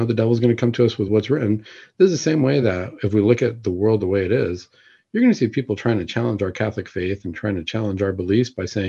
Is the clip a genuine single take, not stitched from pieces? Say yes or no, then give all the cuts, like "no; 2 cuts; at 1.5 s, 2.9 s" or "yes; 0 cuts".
yes; 0 cuts